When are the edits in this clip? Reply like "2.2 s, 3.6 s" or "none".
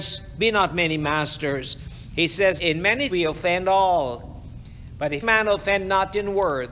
2.6 s, 3.1 s, 5.2 s